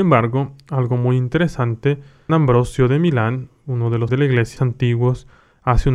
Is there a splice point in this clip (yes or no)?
yes